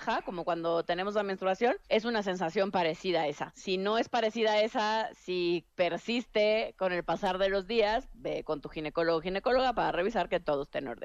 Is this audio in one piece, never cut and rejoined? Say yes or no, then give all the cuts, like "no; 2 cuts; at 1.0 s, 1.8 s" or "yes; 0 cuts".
no; 1 cut; at 5.7 s